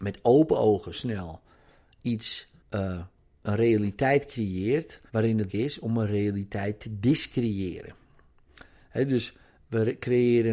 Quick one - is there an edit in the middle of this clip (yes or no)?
yes